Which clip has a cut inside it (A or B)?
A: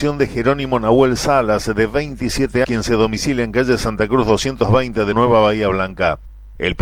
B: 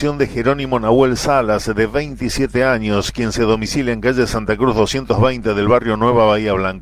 A